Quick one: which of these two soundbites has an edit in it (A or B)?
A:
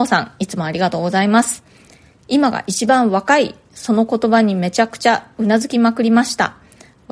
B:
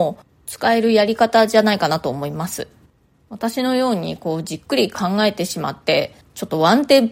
B